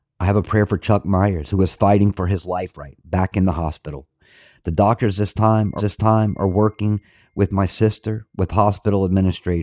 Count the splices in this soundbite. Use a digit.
2